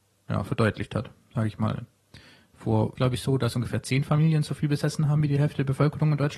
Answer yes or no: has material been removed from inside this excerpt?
yes